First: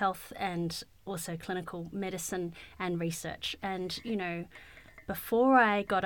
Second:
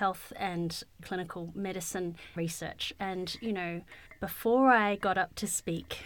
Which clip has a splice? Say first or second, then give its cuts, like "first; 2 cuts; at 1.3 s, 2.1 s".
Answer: second; 3 cuts; at 1.0 s, 2.4 s, 4.1 s